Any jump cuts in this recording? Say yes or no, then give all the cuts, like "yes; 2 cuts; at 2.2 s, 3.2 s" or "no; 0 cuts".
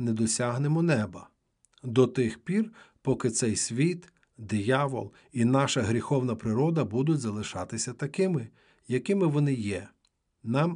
no; 0 cuts